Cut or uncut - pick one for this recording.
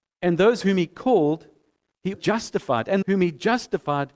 cut